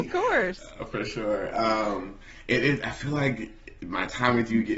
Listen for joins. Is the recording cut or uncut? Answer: uncut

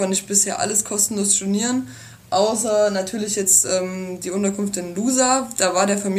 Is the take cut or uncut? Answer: uncut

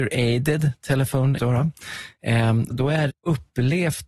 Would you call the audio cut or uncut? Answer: cut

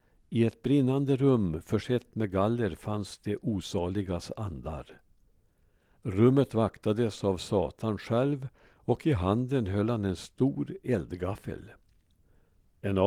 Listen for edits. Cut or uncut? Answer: uncut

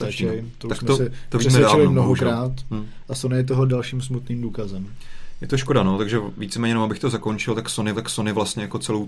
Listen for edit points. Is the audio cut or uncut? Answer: cut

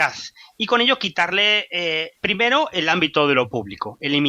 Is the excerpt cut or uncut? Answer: cut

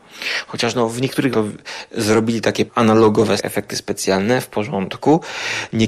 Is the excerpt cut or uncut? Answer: cut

